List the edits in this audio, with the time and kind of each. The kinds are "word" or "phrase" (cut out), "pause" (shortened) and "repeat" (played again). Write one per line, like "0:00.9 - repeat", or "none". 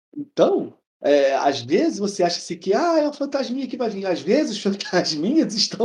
none